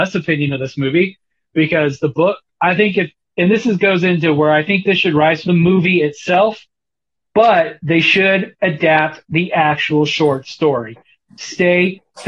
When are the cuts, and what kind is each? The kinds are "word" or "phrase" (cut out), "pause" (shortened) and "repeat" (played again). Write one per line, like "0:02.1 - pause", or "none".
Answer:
0:05.4 - phrase